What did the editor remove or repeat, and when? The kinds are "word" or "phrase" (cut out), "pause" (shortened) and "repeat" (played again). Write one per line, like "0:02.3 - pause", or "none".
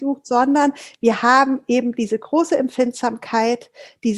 none